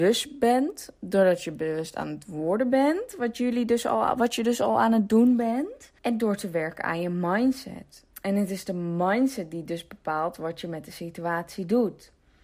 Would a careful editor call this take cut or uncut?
cut